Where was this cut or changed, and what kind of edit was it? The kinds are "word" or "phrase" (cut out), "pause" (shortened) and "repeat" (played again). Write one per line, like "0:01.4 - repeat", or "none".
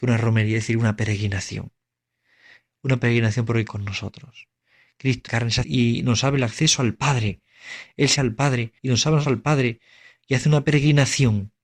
0:03.7 - word
0:05.3 - phrase
0:05.6 - phrase
0:08.1 - word
0:08.8 - pause
0:09.2 - phrase